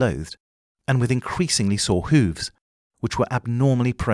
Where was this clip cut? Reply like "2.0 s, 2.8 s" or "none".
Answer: none